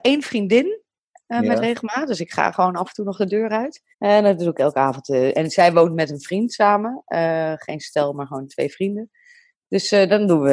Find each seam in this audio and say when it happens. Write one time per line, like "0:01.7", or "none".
0:03.9